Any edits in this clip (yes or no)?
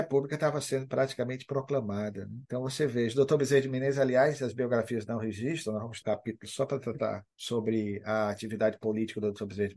yes